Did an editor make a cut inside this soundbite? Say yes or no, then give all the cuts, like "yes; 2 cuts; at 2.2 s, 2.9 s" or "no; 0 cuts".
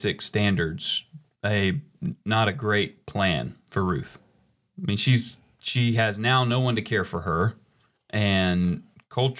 no; 0 cuts